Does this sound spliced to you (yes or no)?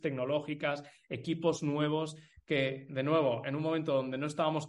no